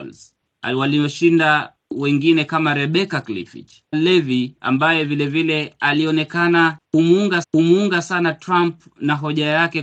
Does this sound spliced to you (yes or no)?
yes